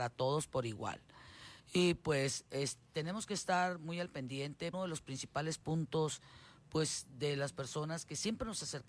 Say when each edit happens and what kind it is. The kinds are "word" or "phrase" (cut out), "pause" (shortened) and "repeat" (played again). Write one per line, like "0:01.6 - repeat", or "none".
0:01.6 - pause
0:04.7 - phrase